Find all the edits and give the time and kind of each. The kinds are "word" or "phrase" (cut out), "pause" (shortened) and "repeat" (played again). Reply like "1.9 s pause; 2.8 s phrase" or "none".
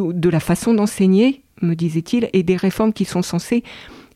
2.3 s word